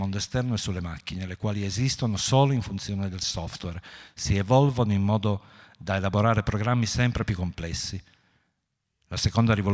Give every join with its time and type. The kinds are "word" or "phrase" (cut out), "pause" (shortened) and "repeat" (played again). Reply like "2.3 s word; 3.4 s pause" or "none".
none